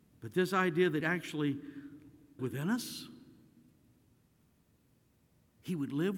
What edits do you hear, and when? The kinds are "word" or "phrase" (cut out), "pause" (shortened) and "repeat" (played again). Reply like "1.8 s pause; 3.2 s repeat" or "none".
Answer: 1.0 s word; 2.4 s word